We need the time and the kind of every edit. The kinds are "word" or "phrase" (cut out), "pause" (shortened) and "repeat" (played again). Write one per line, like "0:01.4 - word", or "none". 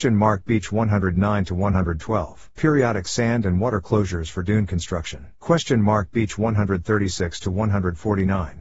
0:02.5 - pause
0:05.4 - pause